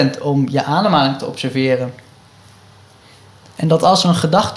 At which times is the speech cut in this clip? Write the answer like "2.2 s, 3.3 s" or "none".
none